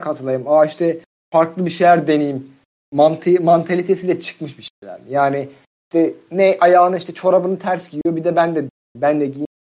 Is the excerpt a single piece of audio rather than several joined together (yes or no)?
yes